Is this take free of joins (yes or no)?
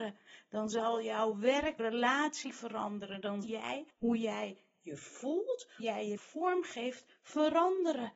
no